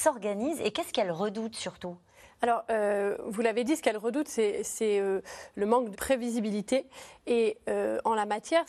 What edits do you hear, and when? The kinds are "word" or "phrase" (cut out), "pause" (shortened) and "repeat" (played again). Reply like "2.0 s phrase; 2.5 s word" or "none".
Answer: 5.9 s phrase